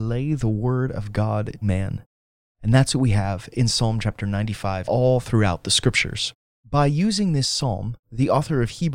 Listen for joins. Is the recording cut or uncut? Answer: cut